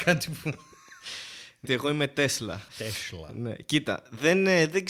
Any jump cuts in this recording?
yes; 2 cuts; at 1.6 s, 2.7 s

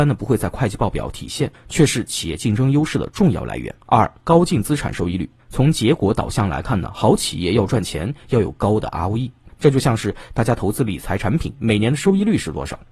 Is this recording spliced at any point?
yes; 1 cut; at 3.8 s

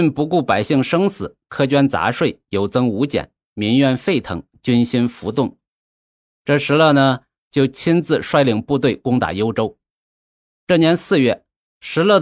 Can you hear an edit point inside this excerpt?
no; 0 cuts

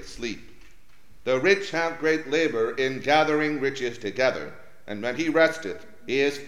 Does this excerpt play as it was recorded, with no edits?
yes; 0 cuts

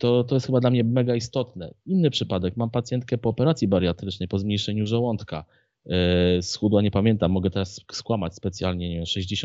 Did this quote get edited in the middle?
no; 0 cuts

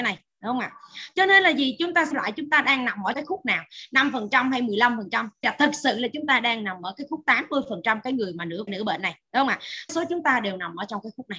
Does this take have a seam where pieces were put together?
yes; 5 cuts; at 2.1 s, 3.1 s, 5.4 s, 8.7 s, 9.9 s

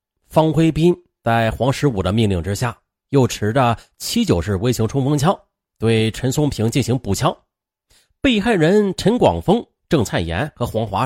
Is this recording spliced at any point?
no; 0 cuts

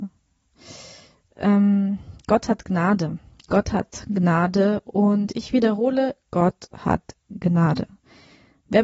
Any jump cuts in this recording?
no; 0 cuts

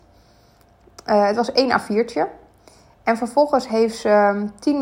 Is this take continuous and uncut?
yes; 0 cuts

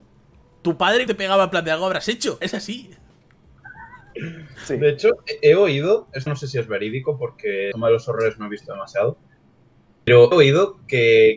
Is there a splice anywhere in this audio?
yes; 5 cuts; at 1.1 s, 2.4 s, 6.3 s, 7.7 s, 10.3 s

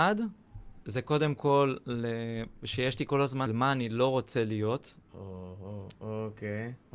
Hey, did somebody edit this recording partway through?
yes; 2 cuts; at 3.5 s, 5.0 s

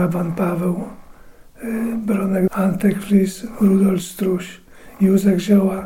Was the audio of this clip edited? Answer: yes; 1 cut; at 2.5 s

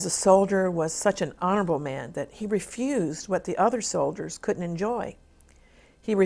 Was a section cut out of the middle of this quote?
no; 0 cuts

